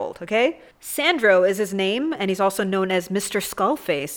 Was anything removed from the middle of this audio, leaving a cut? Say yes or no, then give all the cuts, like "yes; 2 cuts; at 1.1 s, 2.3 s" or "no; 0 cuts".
no; 0 cuts